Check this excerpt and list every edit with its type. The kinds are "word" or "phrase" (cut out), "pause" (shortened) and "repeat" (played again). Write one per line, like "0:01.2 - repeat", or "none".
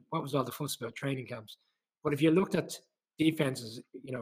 none

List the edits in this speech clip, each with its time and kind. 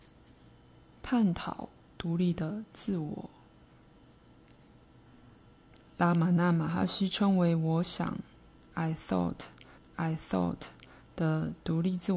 0:09.8 - repeat

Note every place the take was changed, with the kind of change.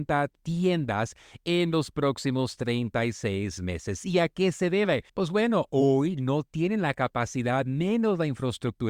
0:05.1 - pause

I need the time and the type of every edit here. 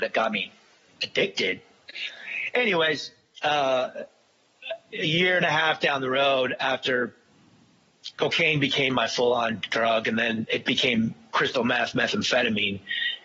0:08.1 - word

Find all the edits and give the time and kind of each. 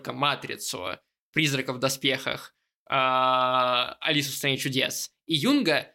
none

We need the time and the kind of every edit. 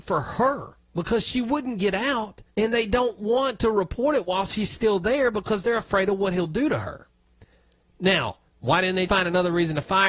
0:02.5 - pause
0:08.5 - pause
0:09.1 - word

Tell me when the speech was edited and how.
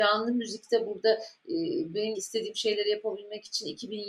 0:02.1 - word

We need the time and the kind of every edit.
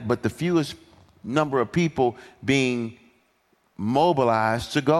none

